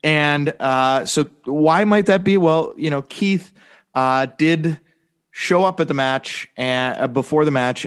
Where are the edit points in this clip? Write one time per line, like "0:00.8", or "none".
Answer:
none